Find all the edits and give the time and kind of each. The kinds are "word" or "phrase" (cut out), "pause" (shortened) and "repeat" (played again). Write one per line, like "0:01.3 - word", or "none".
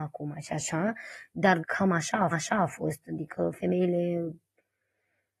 0:01.6 - word
0:02.3 - repeat